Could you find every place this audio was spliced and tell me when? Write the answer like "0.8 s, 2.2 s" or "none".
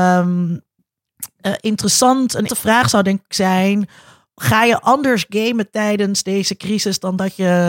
2.5 s